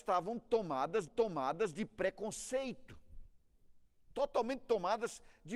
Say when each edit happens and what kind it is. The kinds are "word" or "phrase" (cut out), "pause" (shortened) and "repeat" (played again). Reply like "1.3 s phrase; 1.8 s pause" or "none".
1.1 s repeat; 3.8 s pause